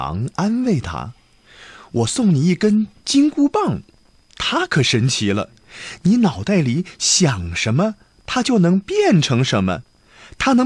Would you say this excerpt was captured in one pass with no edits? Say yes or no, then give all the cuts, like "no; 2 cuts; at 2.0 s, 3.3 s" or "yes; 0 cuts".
yes; 0 cuts